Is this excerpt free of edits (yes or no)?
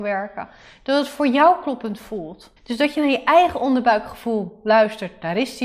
no